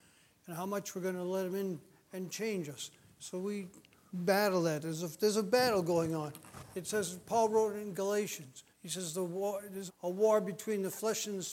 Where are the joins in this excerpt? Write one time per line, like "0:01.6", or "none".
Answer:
0:04.1
0:08.7
0:09.9

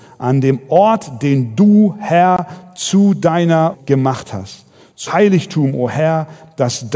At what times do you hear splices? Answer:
0:03.7
0:05.1

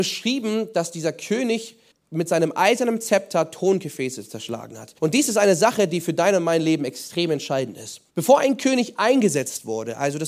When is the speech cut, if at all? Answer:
0:01.9
0:05.0
0:08.1

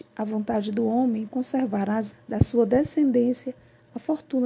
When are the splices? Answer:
0:01.3
0:02.1

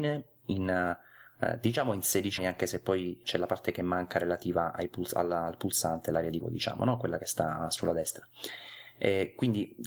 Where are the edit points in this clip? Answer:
0:02.4
0:03.2
0:06.4

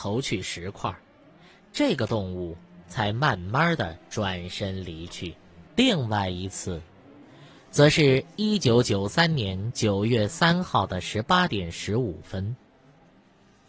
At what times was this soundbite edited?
0:05.7

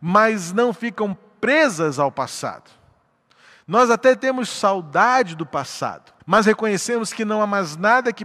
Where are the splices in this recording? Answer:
0:06.2

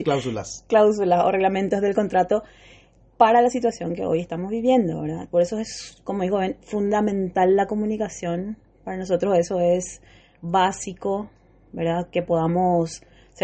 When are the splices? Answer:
none

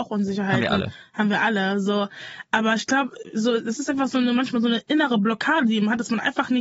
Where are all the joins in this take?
none

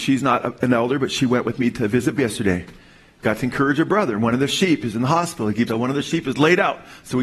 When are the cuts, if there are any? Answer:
0:02.2
0:05.7

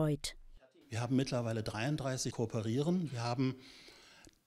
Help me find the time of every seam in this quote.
0:02.3

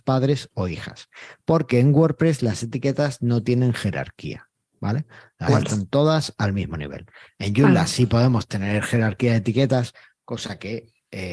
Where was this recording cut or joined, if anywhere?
0:05.5

